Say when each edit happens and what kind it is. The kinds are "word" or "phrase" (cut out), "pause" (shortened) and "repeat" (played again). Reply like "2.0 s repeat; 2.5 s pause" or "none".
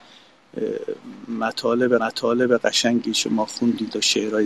2.0 s repeat